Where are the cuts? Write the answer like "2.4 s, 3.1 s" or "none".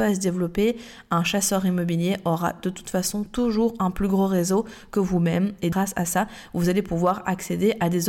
none